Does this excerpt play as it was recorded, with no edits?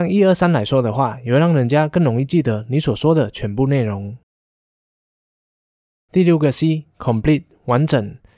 yes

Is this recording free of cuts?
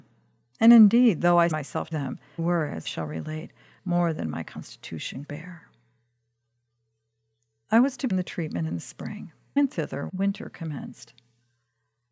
no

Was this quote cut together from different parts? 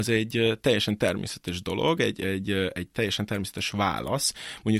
no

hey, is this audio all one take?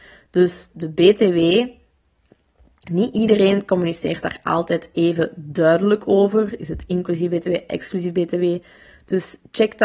yes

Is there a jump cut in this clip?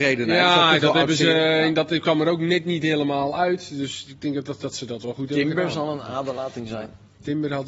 no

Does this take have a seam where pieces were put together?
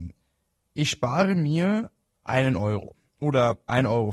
no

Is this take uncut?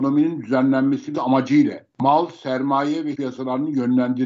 no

